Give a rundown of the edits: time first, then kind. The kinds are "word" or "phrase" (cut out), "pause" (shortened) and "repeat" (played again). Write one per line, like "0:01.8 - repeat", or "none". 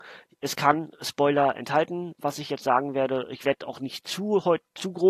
none